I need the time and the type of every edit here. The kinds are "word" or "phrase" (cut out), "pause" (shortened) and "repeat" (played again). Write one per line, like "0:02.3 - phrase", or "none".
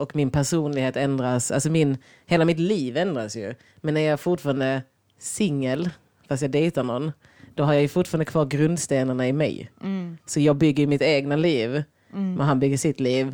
none